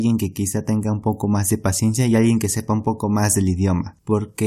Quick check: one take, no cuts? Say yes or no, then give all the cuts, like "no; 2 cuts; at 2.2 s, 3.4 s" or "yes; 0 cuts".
yes; 0 cuts